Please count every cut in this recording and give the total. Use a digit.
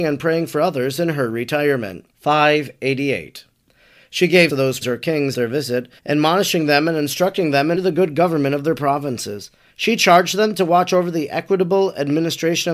7